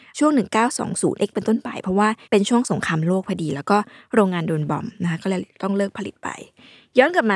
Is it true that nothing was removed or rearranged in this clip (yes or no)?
no